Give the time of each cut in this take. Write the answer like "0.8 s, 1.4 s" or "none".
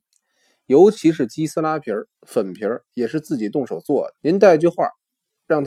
2.1 s, 4.2 s